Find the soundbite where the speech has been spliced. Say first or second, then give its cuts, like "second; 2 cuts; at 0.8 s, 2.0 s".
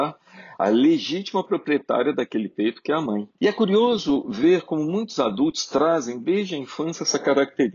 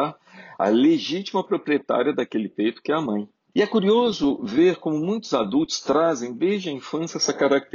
first; 1 cut; at 3.3 s